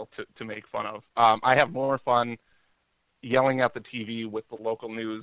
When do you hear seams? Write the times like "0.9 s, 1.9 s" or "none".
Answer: none